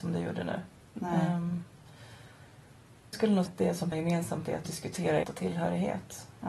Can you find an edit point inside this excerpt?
yes; 5 cuts; at 3.1 s, 3.5 s, 3.9 s, 4.6 s, 5.2 s

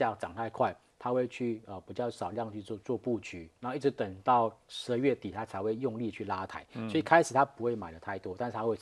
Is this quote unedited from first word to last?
no; 2 cuts; at 3.6 s, 4.6 s

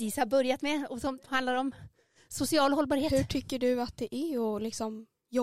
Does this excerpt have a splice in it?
no; 0 cuts

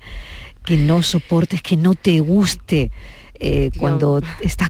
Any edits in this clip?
yes; 1 cut; at 3.7 s

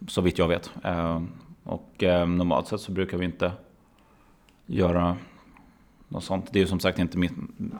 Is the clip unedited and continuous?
yes; 0 cuts

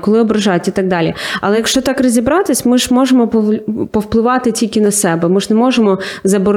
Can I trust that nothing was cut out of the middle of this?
yes; 0 cuts

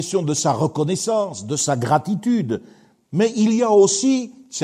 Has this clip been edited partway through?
no; 0 cuts

